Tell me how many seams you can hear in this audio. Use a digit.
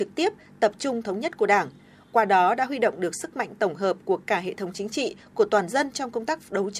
0